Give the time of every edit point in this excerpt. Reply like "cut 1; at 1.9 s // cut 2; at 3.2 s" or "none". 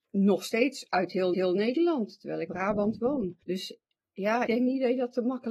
cut 1; at 1.3 s // cut 2; at 2.5 s // cut 3; at 3.4 s // cut 4; at 4.5 s